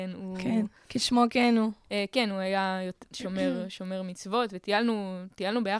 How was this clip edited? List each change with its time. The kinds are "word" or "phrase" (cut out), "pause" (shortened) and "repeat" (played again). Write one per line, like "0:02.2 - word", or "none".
none